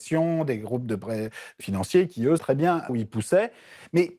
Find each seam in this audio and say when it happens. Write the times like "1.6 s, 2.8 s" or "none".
1.6 s, 2.4 s, 2.9 s